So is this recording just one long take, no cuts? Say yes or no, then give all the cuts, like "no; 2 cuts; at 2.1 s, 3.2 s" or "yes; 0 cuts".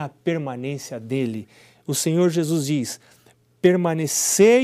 yes; 0 cuts